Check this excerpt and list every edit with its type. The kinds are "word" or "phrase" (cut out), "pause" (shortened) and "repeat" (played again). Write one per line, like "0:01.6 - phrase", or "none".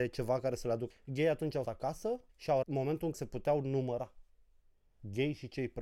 0:00.9 - phrase
0:01.6 - word
0:02.3 - pause
0:02.6 - word
0:03.1 - word